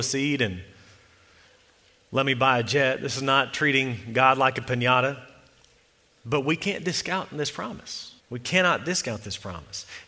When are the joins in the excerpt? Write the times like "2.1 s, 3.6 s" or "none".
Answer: 5.8 s, 8.2 s